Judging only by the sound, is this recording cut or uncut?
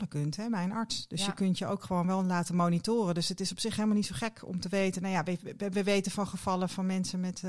uncut